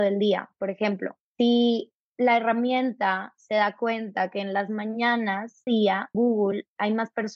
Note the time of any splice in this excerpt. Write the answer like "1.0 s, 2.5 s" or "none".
1.3 s, 5.7 s, 6.1 s